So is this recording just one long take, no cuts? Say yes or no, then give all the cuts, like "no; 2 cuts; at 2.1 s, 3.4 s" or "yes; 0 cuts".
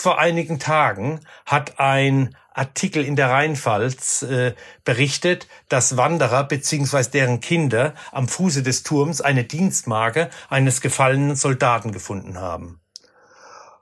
yes; 0 cuts